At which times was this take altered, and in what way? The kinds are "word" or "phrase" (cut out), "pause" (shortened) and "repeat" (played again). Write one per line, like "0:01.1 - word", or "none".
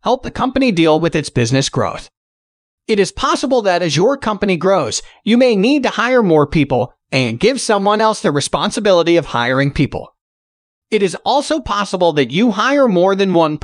none